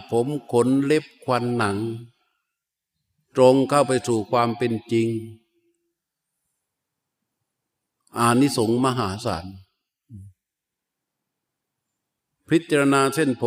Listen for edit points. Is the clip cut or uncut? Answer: uncut